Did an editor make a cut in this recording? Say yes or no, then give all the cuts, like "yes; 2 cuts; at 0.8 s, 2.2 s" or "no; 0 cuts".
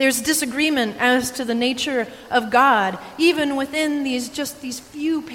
no; 0 cuts